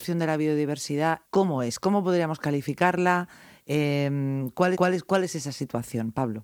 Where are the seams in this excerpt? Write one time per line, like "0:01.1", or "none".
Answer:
0:01.2
0:04.7

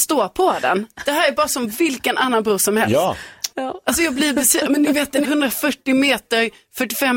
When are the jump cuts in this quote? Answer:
0:01.0
0:03.5
0:05.2

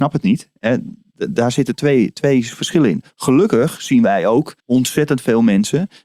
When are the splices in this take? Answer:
0:04.6

